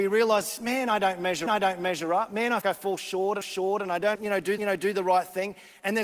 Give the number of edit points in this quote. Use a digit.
5